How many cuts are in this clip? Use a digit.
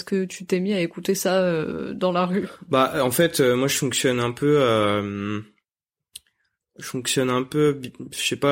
0